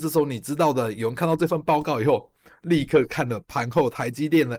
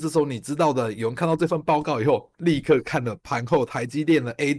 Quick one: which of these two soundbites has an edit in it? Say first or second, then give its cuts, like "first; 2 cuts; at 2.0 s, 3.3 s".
second; 1 cut; at 2.3 s